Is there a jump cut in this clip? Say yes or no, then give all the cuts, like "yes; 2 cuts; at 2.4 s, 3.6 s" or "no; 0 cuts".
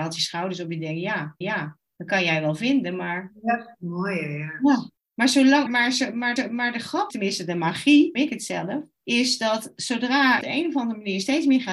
yes; 8 cuts; at 1.4 s, 5.0 s, 5.7 s, 6.4 s, 7.1 s, 8.1 s, 8.9 s, 10.4 s